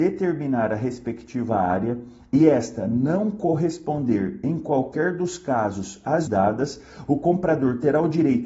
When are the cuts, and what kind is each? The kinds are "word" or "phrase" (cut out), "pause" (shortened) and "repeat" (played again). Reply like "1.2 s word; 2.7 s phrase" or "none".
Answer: 6.3 s word